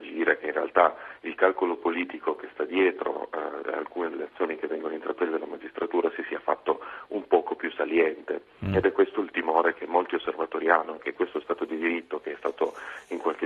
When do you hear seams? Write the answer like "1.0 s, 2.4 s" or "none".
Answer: 11.0 s

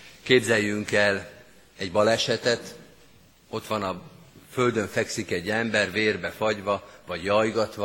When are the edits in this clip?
none

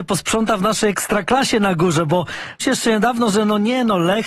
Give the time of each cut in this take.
2.6 s

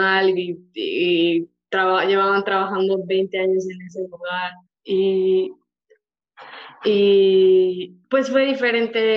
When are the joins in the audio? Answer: 4.7 s, 8.0 s

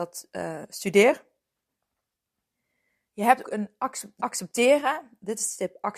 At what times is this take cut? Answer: 3.4 s, 4.2 s

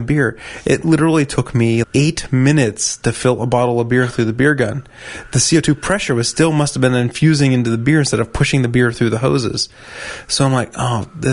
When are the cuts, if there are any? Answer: 1.8 s

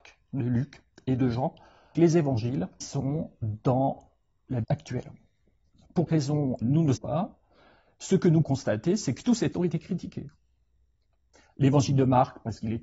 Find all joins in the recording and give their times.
1.9 s, 2.8 s, 4.6 s, 6.1 s, 6.6 s, 7.0 s, 8.4 s, 9.5 s

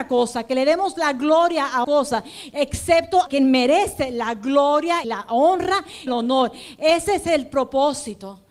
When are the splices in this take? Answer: 1.8 s, 3.3 s, 5.0 s, 6.1 s

